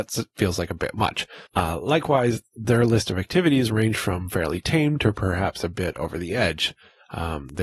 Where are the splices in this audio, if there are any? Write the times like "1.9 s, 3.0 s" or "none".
1.5 s